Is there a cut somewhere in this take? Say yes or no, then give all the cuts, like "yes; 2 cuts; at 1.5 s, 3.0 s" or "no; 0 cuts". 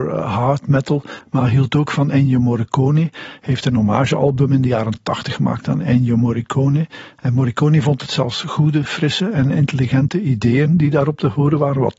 no; 0 cuts